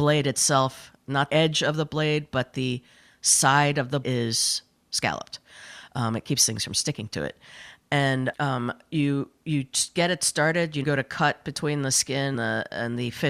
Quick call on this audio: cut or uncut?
cut